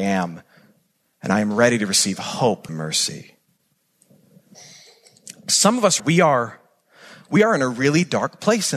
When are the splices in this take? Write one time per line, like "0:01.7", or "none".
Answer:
0:02.7
0:06.0